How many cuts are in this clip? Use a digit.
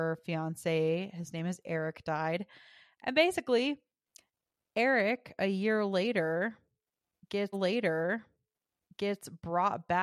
1